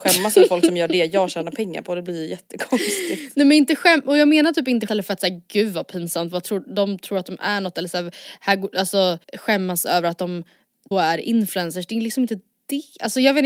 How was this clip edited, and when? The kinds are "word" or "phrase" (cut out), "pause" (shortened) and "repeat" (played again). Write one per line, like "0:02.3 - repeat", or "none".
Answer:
0:04.9 - word
0:09.2 - pause
0:10.9 - word